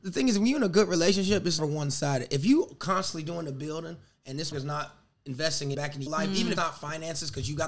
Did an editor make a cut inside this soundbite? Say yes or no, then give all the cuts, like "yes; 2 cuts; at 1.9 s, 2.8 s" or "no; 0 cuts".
yes; 5 cuts; at 1.6 s, 4.5 s, 5.7 s, 6.1 s, 6.6 s